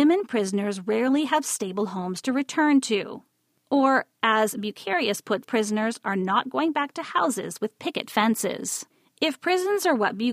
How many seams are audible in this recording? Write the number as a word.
one